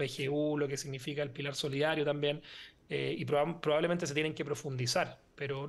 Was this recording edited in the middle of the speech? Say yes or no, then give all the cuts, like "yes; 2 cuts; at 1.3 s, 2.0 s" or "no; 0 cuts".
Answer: no; 0 cuts